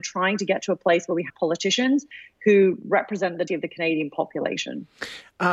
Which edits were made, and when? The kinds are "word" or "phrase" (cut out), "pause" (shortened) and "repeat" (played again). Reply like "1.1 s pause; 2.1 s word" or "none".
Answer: 1.3 s word; 3.5 s word